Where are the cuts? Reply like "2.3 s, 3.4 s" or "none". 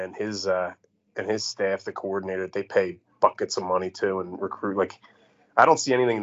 none

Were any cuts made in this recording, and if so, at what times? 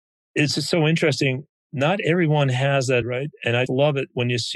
3.0 s, 3.7 s

